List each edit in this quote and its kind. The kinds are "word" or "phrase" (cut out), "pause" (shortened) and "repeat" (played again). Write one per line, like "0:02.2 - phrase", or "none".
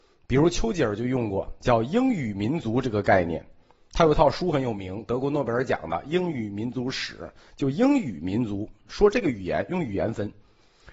none